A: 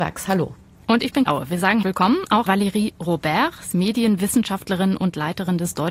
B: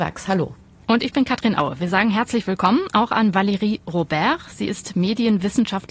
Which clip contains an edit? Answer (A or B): A